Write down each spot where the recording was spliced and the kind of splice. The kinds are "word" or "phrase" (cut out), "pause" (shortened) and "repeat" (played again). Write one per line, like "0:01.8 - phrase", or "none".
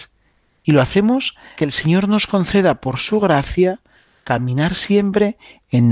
0:01.6 - word